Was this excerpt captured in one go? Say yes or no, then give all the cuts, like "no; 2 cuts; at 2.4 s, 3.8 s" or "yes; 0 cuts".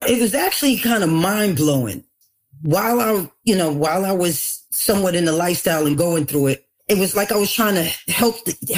yes; 0 cuts